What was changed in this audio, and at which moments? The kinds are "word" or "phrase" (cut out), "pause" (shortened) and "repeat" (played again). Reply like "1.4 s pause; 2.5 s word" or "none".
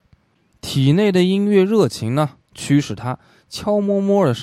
none